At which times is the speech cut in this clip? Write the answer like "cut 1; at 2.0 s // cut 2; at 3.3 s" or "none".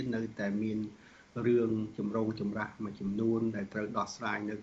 none